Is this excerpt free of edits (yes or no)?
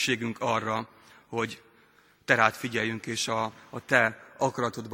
yes